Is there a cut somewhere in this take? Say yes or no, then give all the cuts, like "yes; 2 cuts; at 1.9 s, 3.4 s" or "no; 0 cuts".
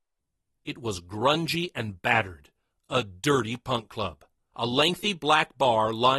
no; 0 cuts